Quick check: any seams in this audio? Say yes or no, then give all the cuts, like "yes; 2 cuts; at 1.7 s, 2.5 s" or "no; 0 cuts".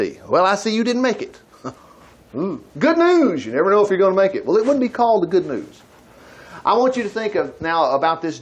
yes; 2 cuts; at 1.8 s, 2.7 s